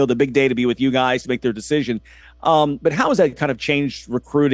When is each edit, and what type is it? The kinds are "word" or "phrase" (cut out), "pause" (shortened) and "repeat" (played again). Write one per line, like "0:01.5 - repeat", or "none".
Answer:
none